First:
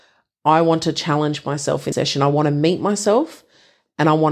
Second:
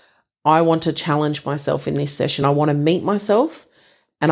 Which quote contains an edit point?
first; 1 cut; at 1.9 s

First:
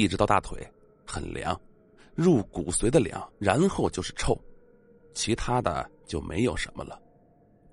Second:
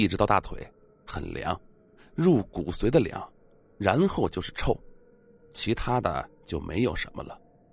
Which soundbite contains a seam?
first; 1 cut; at 3.3 s

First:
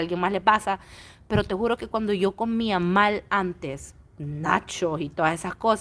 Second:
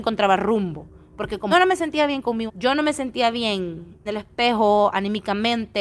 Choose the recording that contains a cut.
second; 3 cuts; at 1.5 s, 2.5 s, 4.1 s

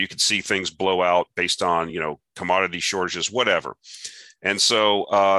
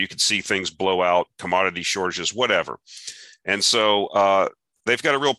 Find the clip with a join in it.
second; 1 cut; at 1.3 s

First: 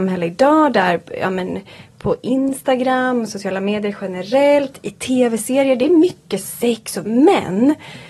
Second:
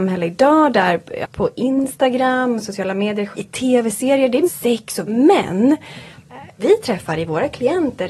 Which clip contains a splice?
second; 4 cuts; at 1.2 s, 3.3 s, 4.4 s, 6.6 s

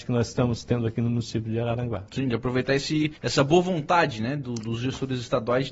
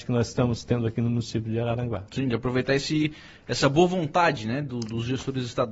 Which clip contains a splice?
first; 1 cut; at 3.2 s

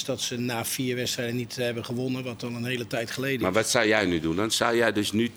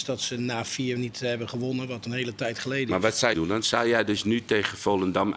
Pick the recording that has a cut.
second; 3 cuts; at 1.0 s, 2.1 s, 3.3 s

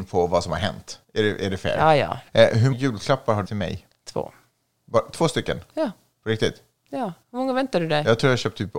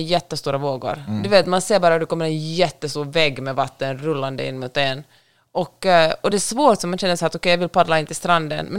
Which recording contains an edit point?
first; 5 cuts; at 1.0 s, 2.3 s, 2.7 s, 3.4 s, 7.2 s

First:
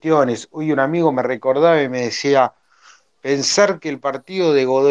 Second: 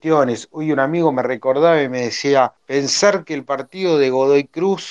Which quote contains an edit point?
second; 1 cut; at 2.6 s

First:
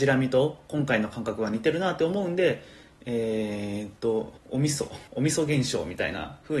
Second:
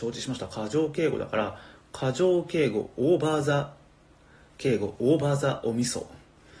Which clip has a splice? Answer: first; 2 cuts; at 4.4 s, 5.1 s

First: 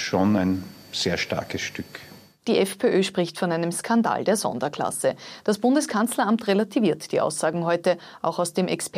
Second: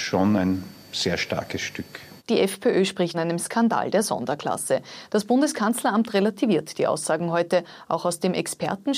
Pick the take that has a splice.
second; 2 cuts; at 2.2 s, 3.1 s

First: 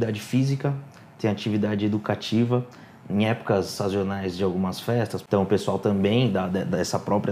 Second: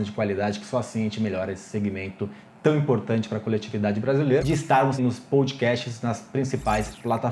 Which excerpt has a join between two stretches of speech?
second; 2 cuts; at 4.4 s, 5.0 s

